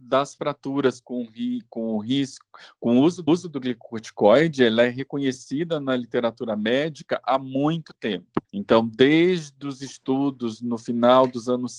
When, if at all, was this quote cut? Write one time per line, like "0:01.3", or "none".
0:03.3
0:08.4